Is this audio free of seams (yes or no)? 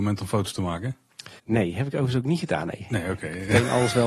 no